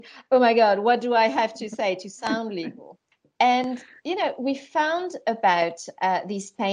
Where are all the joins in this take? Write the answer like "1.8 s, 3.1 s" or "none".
3.1 s